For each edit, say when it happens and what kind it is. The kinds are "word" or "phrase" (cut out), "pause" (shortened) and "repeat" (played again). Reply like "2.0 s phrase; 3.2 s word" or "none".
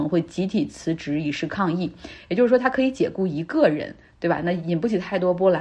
none

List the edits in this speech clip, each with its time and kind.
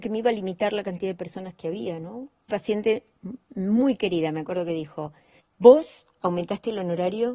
2.5 s word; 5.4 s pause

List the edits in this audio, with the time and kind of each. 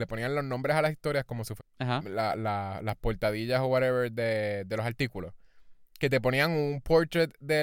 1.6 s phrase

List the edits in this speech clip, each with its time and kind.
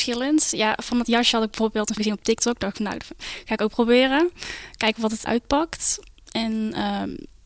2.0 s word; 5.3 s word

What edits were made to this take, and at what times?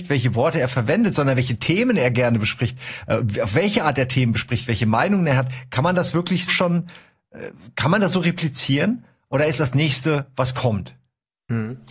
6.5 s word; 9.6 s word

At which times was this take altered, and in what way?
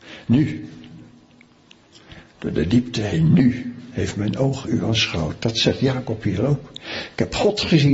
none

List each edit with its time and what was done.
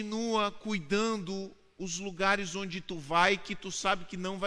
none

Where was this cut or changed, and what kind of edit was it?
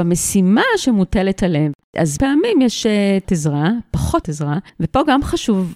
2.2 s phrase; 3.2 s word; 4.2 s word; 4.7 s pause

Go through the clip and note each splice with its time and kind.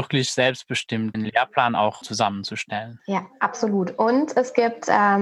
1.1 s word; 2.0 s word

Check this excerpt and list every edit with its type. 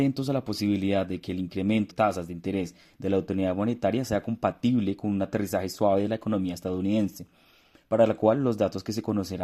1.9 s word

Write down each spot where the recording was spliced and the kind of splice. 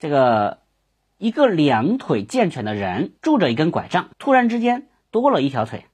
1.0 s pause; 3.2 s pause; 4.1 s pause

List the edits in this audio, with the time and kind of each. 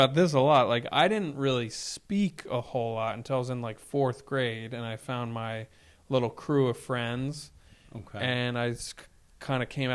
none

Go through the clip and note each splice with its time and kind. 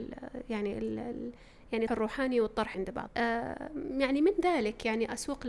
1.9 s word; 2.7 s word; 3.1 s word

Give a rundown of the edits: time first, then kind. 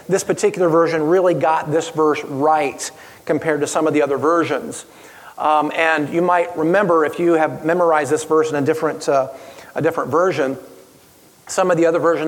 none

